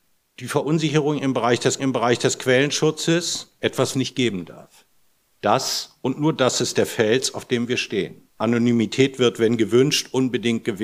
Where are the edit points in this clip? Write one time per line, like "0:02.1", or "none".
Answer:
0:01.8
0:03.9
0:08.3